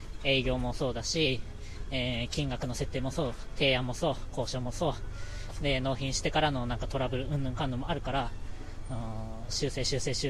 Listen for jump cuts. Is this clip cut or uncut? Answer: uncut